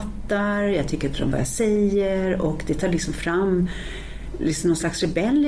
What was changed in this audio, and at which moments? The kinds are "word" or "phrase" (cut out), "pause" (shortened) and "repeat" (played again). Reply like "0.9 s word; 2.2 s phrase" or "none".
1.3 s word